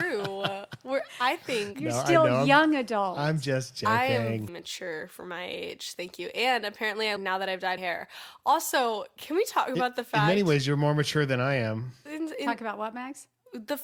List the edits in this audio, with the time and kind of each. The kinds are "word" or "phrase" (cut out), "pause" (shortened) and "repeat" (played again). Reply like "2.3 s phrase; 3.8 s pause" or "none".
4.5 s word; 7.2 s phrase; 7.8 s word

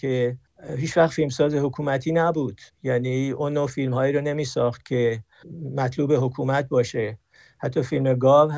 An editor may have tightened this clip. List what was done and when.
none

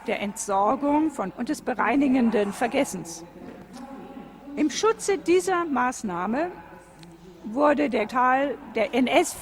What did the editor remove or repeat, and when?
1.3 s word; 8.1 s word

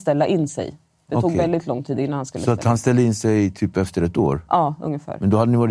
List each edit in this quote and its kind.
none

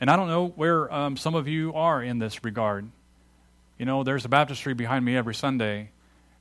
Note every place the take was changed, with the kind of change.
none

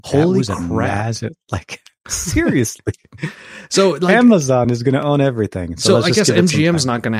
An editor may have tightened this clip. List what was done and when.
none

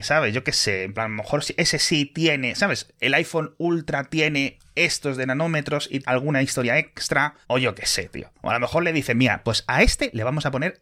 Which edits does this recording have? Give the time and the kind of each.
6.0 s phrase; 7.4 s pause

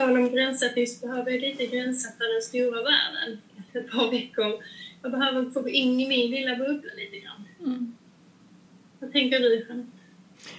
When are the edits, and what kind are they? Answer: 3.7 s pause

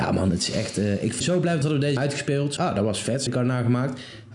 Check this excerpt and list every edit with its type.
1.2 s word; 1.6 s word; 2.0 s word; 2.6 s word; 3.3 s word

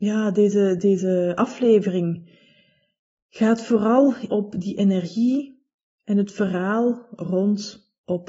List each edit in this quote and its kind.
4.3 s word

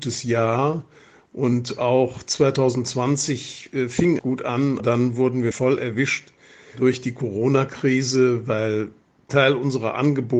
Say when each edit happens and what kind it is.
4.2 s word; 4.8 s word; 5.5 s word; 9.3 s word

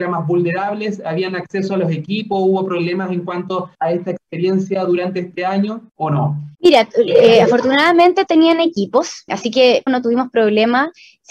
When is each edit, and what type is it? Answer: 3.7 s pause; 5.9 s pause; 6.5 s pause; 8.3 s word; 9.3 s word; 9.9 s phrase

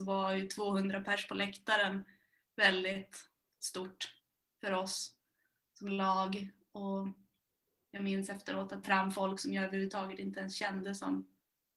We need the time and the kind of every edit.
8.8 s phrase

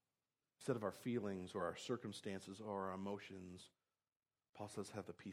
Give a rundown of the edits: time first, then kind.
none

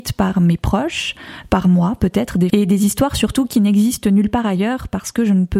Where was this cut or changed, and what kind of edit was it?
2.5 s word

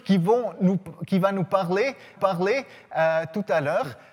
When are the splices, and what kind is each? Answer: 2.2 s repeat

